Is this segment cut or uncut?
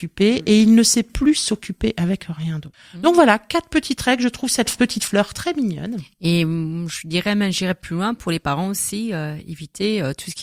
uncut